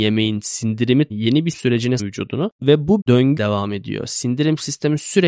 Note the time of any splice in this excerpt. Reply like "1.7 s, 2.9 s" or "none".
1.1 s, 1.5 s, 2.0 s, 3.0 s, 3.4 s